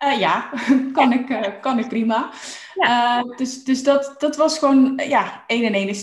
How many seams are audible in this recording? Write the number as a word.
zero